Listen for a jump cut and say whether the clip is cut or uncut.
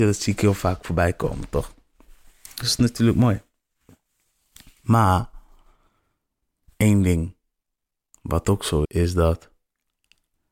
cut